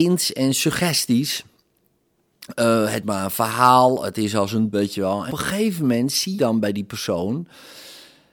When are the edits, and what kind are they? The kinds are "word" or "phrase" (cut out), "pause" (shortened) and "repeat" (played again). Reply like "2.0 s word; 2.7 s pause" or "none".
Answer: 3.0 s word; 4.7 s word; 5.3 s word; 6.4 s word